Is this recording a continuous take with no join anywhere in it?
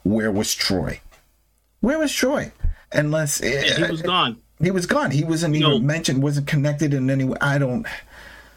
no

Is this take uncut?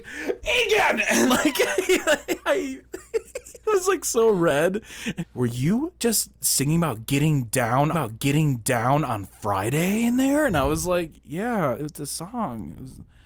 no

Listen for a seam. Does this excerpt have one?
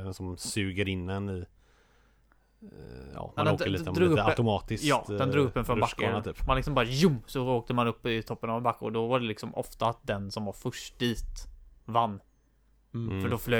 no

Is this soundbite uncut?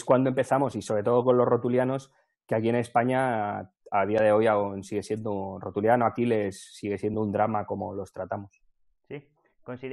yes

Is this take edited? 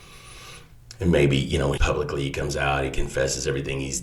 yes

